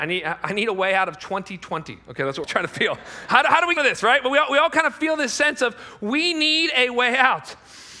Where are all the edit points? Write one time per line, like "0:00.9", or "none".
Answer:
0:02.4
0:03.8